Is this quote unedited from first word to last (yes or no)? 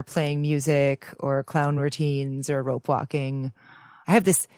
yes